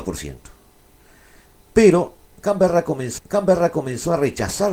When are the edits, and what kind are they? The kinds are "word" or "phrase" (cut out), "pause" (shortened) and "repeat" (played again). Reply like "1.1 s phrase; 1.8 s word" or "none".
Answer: 3.2 s repeat